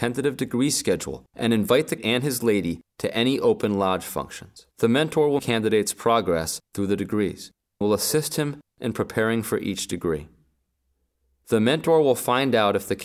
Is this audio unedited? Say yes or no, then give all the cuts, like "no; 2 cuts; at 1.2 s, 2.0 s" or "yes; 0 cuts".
no; 5 cuts; at 1.3 s, 2.0 s, 4.7 s, 5.4 s, 7.8 s